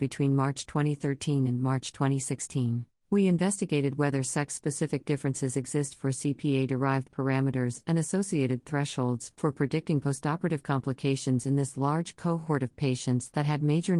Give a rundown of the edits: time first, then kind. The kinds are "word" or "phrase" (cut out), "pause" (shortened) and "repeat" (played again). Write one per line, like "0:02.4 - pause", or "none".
0:03.0 - pause